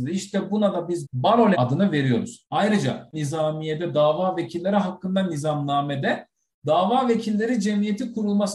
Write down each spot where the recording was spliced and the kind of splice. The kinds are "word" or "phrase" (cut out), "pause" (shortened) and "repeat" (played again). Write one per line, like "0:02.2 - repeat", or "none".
0:01.0 - word
0:01.5 - word
0:03.1 - word